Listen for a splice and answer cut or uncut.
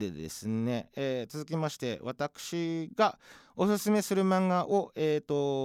uncut